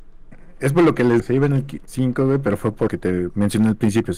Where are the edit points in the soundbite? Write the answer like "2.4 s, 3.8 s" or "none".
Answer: 1.2 s, 1.8 s, 2.9 s